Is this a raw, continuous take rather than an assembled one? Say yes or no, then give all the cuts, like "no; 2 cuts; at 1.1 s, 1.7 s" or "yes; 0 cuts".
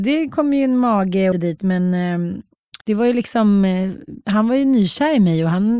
no; 2 cuts; at 1.3 s, 2.8 s